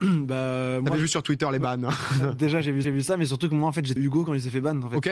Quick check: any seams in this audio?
yes; 2 cuts; at 2.8 s, 4.0 s

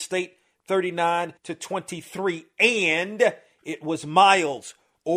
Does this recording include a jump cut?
yes; 1 cut; at 1.4 s

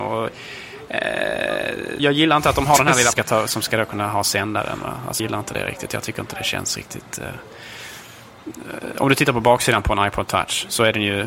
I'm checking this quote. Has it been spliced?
yes; 3 cuts; at 2.0 s, 3.1 s, 5.2 s

